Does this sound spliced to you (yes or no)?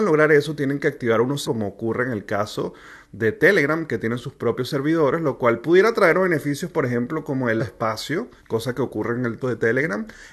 yes